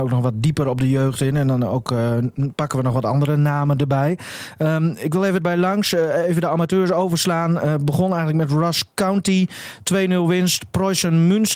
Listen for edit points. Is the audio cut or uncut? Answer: cut